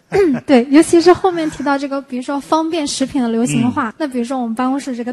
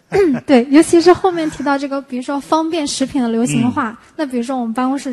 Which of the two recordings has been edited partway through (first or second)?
first